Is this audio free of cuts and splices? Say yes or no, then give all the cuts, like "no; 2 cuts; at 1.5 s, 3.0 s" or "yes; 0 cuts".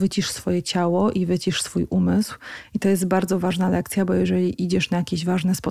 yes; 0 cuts